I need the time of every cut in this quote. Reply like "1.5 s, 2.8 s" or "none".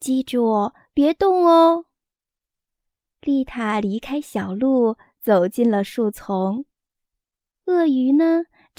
none